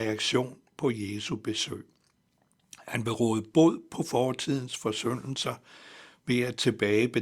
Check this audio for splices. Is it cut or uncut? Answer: uncut